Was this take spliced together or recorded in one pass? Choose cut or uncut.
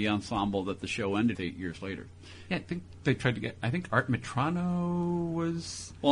cut